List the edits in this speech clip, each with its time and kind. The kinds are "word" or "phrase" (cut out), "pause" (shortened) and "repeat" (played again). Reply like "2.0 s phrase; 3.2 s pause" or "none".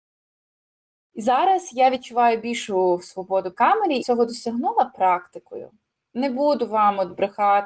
3.5 s word; 4.0 s phrase